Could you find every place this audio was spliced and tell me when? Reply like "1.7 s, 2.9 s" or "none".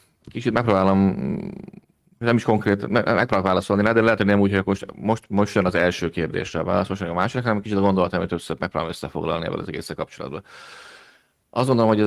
none